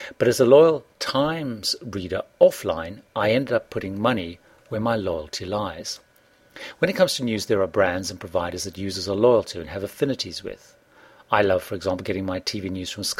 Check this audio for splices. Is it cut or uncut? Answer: uncut